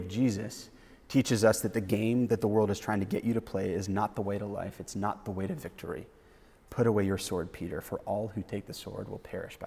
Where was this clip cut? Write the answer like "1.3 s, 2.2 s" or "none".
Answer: none